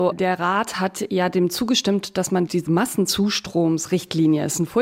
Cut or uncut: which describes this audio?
uncut